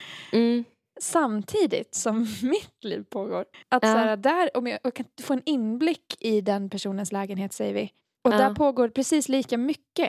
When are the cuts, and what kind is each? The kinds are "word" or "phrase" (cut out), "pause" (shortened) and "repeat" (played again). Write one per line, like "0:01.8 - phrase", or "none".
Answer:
0:03.5 - pause
0:08.0 - pause